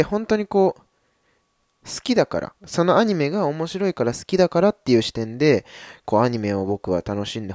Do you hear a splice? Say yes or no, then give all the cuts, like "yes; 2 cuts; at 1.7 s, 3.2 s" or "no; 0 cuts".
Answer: yes; 1 cut; at 2.6 s